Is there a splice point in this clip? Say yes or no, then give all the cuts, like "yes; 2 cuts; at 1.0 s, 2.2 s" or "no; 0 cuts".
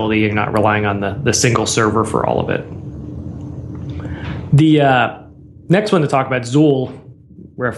no; 0 cuts